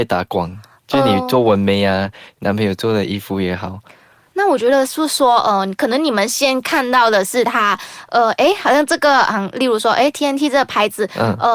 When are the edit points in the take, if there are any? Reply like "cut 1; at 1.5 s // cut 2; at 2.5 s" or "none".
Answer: none